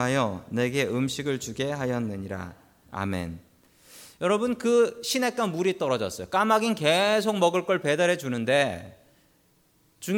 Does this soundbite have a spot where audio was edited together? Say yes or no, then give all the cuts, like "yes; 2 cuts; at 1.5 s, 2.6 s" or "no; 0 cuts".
no; 0 cuts